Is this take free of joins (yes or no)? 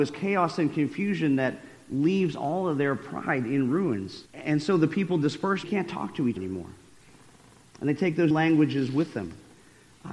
no